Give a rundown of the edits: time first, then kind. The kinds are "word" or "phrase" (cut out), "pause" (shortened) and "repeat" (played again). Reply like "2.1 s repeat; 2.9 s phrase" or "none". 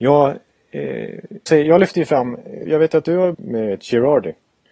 1.5 s word; 2.6 s word; 3.3 s phrase

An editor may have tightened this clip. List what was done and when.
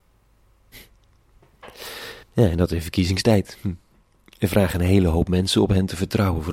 2.2 s pause

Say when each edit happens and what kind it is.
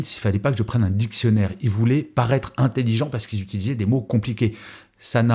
none

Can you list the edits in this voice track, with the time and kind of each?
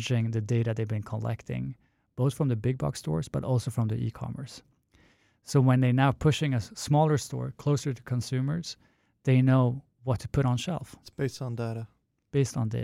none

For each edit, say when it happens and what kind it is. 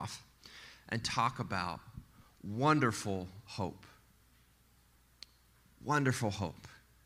none

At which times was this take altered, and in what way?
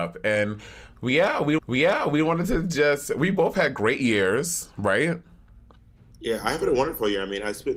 1.6 s repeat

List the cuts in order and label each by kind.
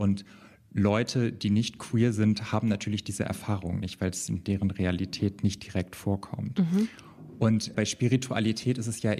none

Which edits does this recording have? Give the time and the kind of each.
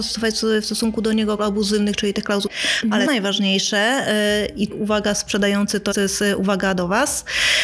1.4 s word; 2.5 s word; 3.1 s word; 4.7 s word; 5.9 s word

